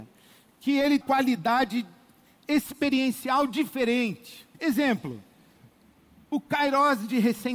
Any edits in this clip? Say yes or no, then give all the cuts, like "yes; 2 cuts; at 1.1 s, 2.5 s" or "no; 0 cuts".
yes; 2 cuts; at 1.0 s, 4.5 s